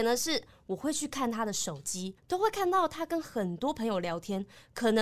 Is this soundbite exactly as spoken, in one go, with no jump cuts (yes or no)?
no